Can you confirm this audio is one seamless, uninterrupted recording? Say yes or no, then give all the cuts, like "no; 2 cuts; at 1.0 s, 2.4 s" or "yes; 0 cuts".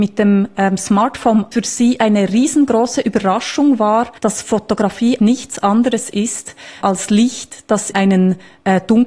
no; 5 cuts; at 1.5 s, 4.2 s, 5.2 s, 6.8 s, 7.9 s